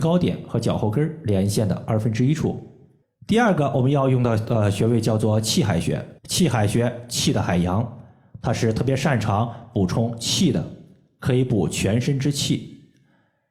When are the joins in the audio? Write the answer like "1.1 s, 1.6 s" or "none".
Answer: 6.2 s

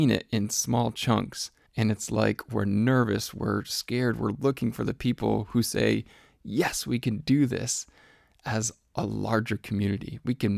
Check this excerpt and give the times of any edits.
1.7 s

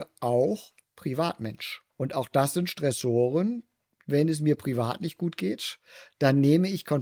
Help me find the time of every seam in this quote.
1.9 s

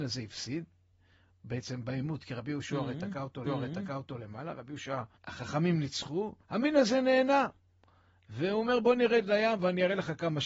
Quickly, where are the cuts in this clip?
3.5 s, 5.2 s, 6.4 s

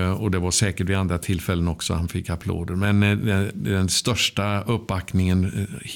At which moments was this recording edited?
none

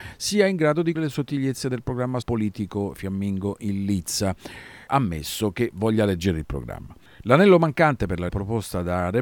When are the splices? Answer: 1.0 s, 2.2 s, 4.9 s, 8.3 s

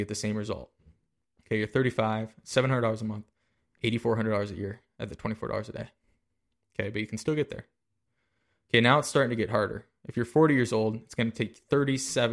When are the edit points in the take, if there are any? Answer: none

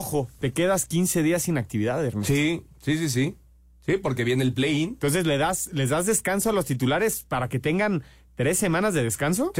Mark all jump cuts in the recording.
none

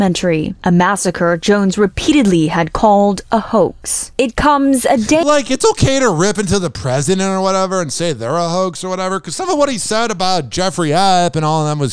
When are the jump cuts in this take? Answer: none

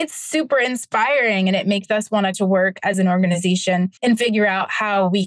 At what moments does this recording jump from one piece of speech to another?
2.3 s, 4.0 s

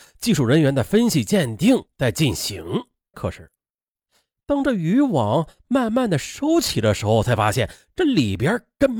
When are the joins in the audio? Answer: 3.1 s

